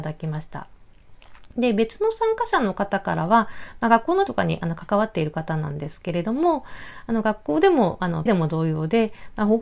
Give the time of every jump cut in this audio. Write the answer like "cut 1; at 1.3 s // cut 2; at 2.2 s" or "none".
cut 1; at 4.3 s // cut 2; at 8.3 s